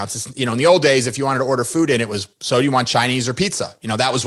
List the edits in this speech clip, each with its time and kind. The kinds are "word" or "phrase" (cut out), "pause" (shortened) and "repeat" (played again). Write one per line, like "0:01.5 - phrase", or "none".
none